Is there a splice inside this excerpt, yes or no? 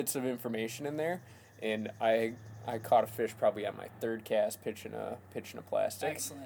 no